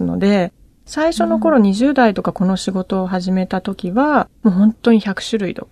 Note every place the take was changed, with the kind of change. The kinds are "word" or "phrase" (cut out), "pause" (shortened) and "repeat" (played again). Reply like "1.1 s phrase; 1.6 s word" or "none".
4.4 s pause